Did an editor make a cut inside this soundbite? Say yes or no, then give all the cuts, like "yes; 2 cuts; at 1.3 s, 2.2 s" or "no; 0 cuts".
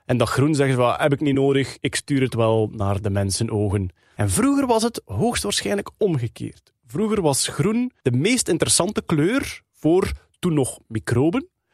no; 0 cuts